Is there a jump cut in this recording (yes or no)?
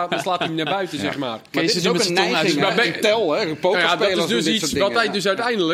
no